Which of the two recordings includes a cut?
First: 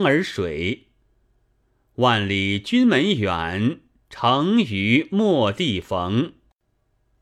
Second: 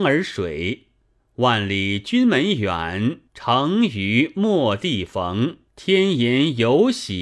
second; 3 cuts; at 1.2 s, 3.3 s, 5.7 s

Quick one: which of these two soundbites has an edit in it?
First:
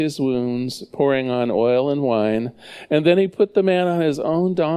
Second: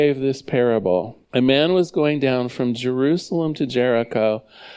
second; 1 cut; at 1.2 s

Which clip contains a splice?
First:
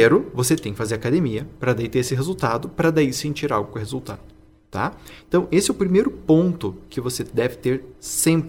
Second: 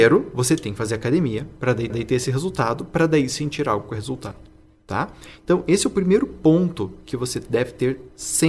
second; 1 cut; at 1.9 s

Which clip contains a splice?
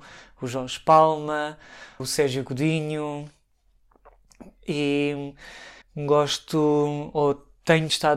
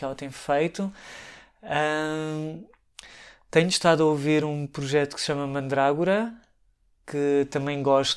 first; 2 cuts; at 2.0 s, 5.8 s

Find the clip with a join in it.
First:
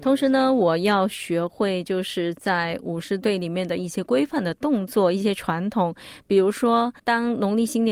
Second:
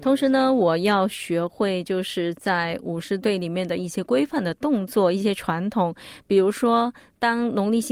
first; 1 cut; at 7.0 s

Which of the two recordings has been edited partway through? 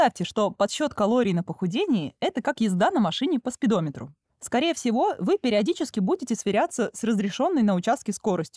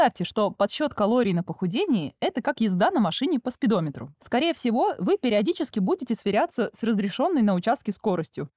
second; 1 cut; at 4.1 s

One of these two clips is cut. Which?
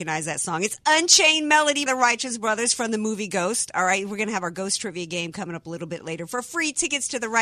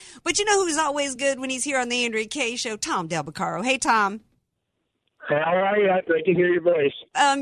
first; 1 cut; at 1.9 s

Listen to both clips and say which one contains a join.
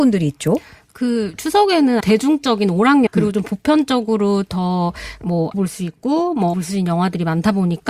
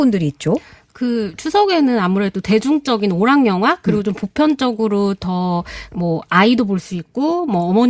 first; 4 cuts; at 2.0 s, 3.1 s, 5.5 s, 6.5 s

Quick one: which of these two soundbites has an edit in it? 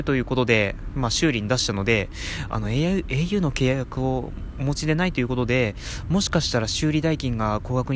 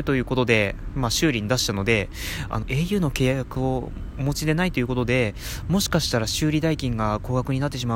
second; 1 cut; at 2.6 s

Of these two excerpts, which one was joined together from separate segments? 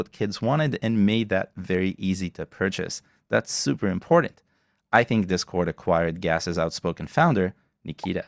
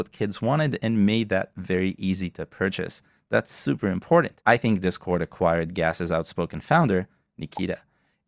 second; 1 cut; at 4.4 s

